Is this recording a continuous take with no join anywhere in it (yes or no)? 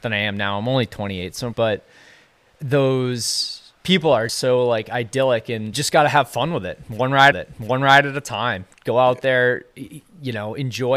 no